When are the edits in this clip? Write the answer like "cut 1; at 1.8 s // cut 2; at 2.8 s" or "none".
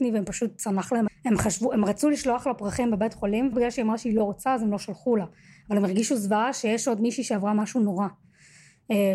cut 1; at 1.1 s // cut 2; at 3.5 s